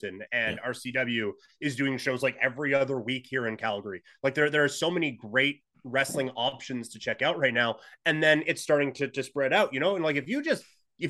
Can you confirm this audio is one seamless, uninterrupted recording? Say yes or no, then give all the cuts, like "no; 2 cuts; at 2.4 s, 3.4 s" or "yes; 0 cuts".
yes; 0 cuts